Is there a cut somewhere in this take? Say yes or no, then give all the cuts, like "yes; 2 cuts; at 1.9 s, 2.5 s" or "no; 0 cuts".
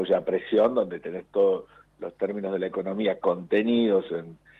no; 0 cuts